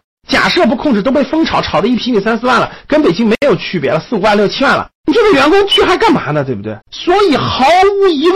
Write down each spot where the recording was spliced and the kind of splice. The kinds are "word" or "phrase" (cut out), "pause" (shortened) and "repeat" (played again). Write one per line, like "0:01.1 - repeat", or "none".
0:05.0 - pause
0:06.8 - pause